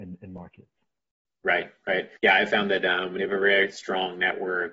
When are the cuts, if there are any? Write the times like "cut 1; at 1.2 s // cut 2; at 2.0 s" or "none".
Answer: cut 1; at 2.2 s